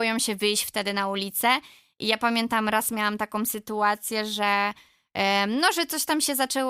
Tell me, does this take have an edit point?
no; 0 cuts

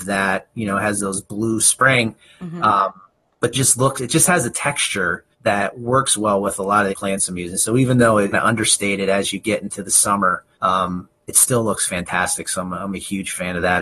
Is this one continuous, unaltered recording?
no; 6 cuts; at 1.6 s, 3.5 s, 5.3 s, 6.9 s, 8.3 s, 10.5 s

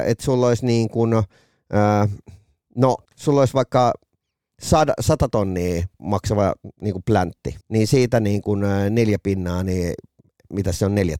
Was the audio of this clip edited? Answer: yes; 3 cuts; at 3.1 s, 5.9 s, 7.6 s

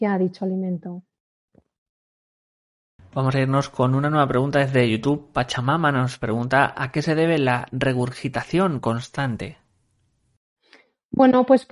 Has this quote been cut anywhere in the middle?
no; 0 cuts

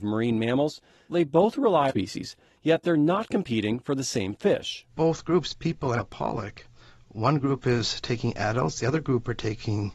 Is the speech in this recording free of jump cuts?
no; 3 cuts; at 1.1 s, 1.9 s, 6.0 s

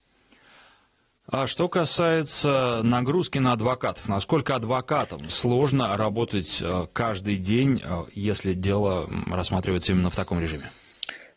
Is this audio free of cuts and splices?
yes; 0 cuts

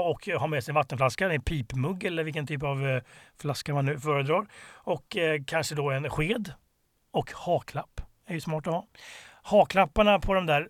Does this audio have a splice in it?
no; 0 cuts

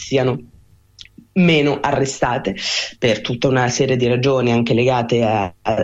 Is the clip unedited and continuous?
yes; 0 cuts

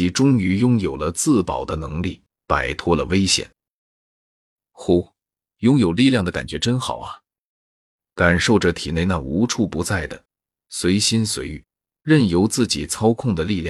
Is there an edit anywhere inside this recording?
no; 0 cuts

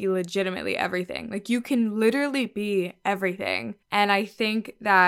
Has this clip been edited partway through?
yes; 1 cut; at 3.8 s

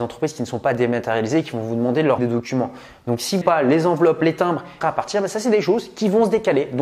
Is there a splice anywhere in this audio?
yes; 3 cuts; at 2.2 s, 3.4 s, 4.8 s

